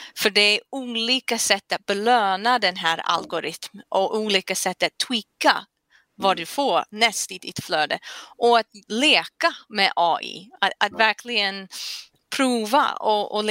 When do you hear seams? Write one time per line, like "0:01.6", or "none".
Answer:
0:08.8